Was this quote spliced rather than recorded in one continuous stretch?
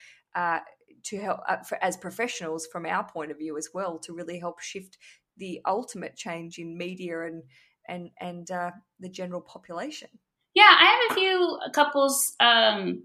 no; 0 cuts

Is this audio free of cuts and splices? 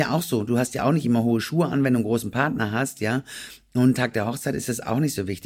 no; 1 cut; at 3.9 s

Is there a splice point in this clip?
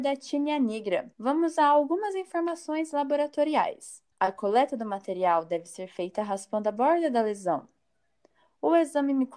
yes; 2 cuts; at 1.1 s, 4.1 s

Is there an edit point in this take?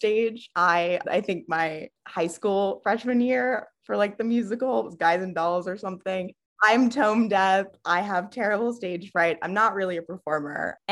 yes; 1 cut; at 1.0 s

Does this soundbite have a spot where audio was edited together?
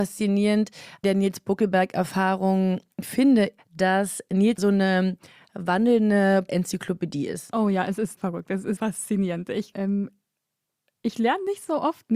yes; 7 cuts; at 1.0 s, 3.6 s, 4.6 s, 6.5 s, 8.2 s, 8.8 s, 9.7 s

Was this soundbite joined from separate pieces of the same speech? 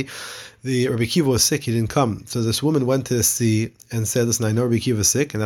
no; 0 cuts

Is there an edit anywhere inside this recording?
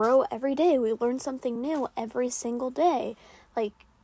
no; 0 cuts

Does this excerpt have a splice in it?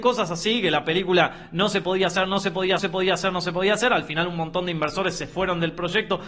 yes; 1 cut; at 2.8 s

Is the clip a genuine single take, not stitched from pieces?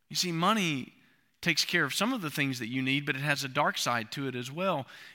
yes; 0 cuts

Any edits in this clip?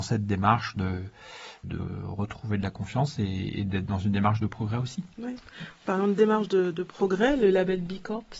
yes; 1 cut; at 1.6 s

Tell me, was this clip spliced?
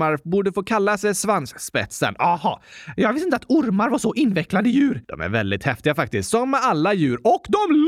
yes; 1 cut; at 5.0 s

